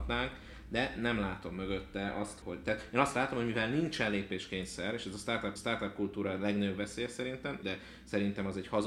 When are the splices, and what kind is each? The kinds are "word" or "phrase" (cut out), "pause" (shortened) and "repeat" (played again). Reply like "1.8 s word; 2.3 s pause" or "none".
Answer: 2.4 s word; 5.6 s repeat; 7.6 s phrase

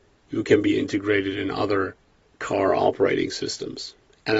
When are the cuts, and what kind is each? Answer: 2.3 s pause

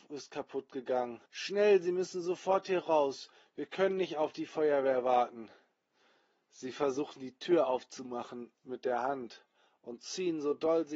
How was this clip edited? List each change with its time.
1.3 s pause

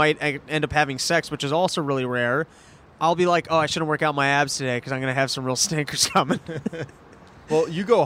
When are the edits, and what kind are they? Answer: none

